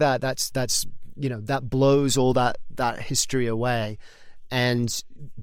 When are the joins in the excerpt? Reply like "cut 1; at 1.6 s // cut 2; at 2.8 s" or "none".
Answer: none